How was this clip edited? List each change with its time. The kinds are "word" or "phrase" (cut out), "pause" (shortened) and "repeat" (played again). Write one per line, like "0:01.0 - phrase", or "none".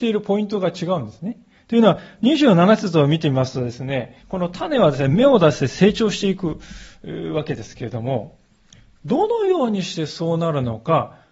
0:04.2 - pause